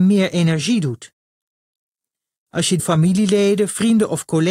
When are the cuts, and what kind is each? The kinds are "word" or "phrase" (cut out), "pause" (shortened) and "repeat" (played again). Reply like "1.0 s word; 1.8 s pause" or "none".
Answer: 2.8 s word